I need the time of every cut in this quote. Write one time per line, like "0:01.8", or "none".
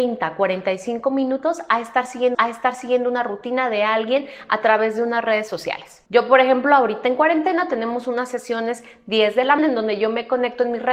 0:02.3
0:06.1
0:09.6